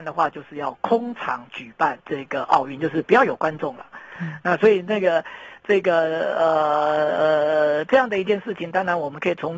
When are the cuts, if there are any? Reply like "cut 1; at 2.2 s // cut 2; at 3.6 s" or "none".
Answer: cut 1; at 2.0 s